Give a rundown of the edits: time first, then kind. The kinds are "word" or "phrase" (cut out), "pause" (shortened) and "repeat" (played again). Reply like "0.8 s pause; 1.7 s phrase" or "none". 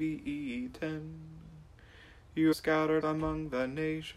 2.5 s word; 3.0 s word